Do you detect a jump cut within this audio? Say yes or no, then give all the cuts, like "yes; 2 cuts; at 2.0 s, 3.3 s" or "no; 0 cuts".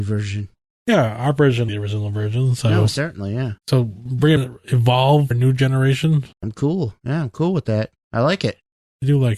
yes; 5 cuts; at 1.7 s, 3.6 s, 4.4 s, 5.3 s, 6.3 s